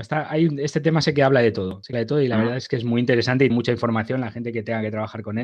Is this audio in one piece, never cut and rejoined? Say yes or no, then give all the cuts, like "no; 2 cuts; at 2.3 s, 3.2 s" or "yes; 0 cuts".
no; 2 cuts; at 1.9 s, 3.5 s